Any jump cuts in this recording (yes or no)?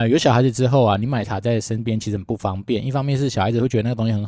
yes